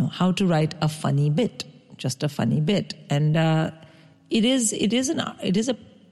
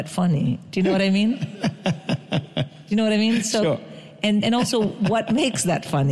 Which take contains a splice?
second; 1 cut; at 4.4 s

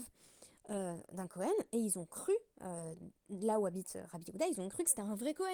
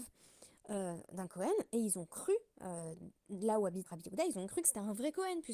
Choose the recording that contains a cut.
second; 1 cut; at 3.9 s

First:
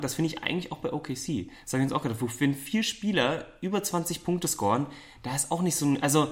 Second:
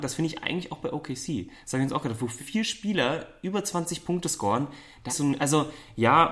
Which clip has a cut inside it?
second; 2 cuts; at 2.4 s, 5.1 s

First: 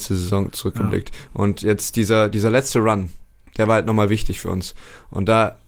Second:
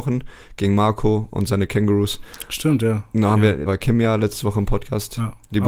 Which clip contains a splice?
second; 1 cut; at 3.7 s

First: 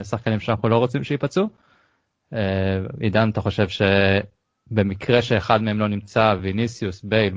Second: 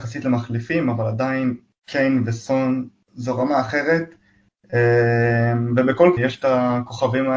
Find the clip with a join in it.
second; 1 cut; at 6.2 s

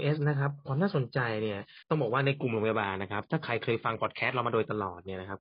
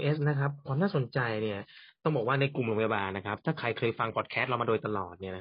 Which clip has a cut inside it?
first; 1 cut; at 1.8 s

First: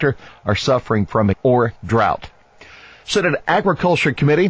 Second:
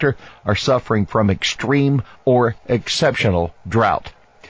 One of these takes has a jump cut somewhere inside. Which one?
first; 2 cuts; at 1.3 s, 1.8 s

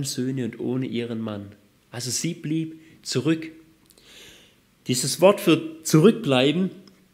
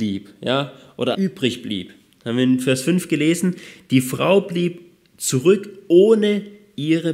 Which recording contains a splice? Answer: second; 1 cut; at 1.1 s

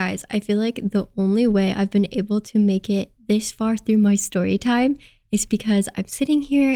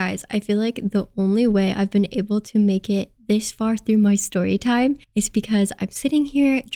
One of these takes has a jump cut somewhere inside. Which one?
second; 1 cut; at 5.0 s

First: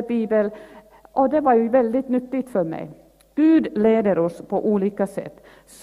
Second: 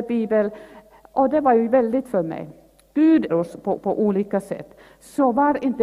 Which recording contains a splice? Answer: second; 3 cuts; at 2.0 s, 3.3 s, 3.8 s

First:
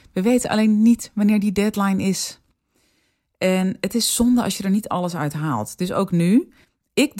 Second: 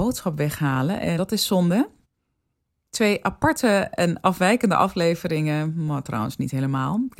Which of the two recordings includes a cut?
second; 1 cut; at 1.2 s

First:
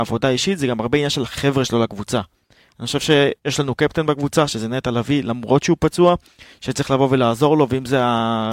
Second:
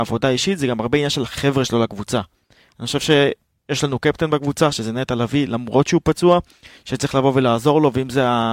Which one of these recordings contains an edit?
first; 1 cut; at 3.4 s

